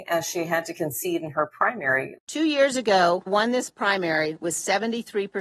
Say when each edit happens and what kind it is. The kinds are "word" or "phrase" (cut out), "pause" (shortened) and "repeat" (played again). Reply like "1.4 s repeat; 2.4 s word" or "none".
2.2 s pause; 3.3 s word